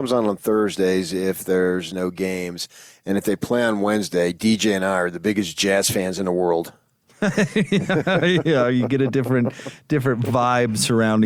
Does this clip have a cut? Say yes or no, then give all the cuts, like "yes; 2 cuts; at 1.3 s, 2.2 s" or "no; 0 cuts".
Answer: no; 0 cuts